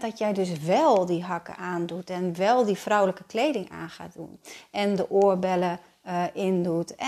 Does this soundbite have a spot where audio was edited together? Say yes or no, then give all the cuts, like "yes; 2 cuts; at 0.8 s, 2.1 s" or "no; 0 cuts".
no; 0 cuts